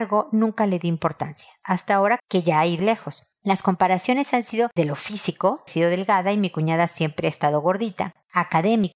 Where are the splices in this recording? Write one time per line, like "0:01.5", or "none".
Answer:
0:02.2
0:02.8
0:04.8
0:05.7